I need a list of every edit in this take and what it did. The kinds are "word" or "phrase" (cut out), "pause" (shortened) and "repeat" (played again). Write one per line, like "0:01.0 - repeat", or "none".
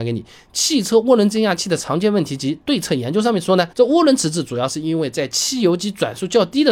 0:03.7 - pause